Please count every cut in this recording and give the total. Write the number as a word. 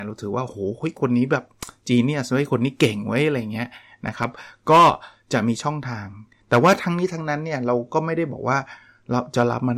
zero